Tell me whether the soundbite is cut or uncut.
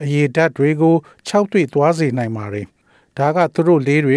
uncut